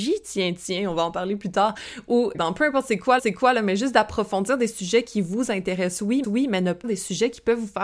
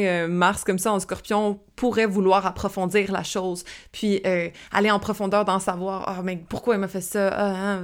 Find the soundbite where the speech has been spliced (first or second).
first